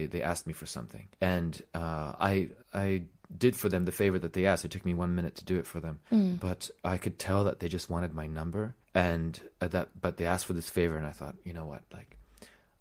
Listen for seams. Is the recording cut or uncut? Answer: cut